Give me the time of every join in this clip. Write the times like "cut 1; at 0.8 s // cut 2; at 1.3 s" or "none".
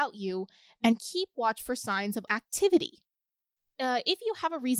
cut 1; at 2.3 s